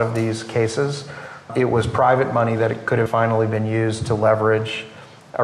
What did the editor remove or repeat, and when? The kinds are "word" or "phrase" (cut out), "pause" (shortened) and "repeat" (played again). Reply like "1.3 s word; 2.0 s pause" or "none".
3.1 s word